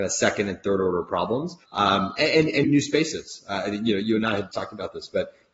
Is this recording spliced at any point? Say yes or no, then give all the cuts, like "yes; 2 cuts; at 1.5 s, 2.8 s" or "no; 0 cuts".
yes; 3 cuts; at 1.6 s, 2.6 s, 4.5 s